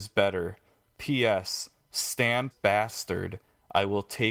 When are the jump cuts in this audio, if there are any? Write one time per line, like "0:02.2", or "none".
0:02.5